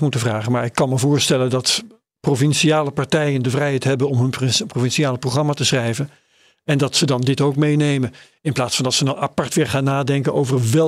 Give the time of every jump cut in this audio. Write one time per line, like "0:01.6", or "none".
none